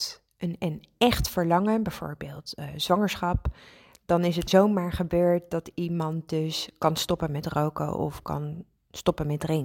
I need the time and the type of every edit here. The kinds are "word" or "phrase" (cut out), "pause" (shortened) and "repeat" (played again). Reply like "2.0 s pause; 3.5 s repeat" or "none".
4.5 s word